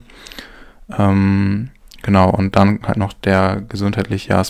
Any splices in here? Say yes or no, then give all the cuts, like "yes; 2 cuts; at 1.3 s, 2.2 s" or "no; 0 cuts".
no; 0 cuts